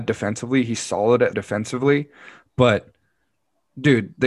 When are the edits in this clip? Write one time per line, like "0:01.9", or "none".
0:01.3